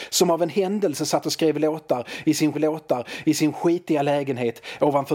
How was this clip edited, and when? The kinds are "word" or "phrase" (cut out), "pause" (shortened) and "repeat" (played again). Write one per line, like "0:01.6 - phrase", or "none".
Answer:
0:02.5 - repeat